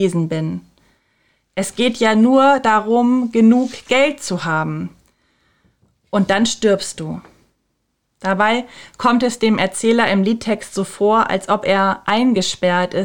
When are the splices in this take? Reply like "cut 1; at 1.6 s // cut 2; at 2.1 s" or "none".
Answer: none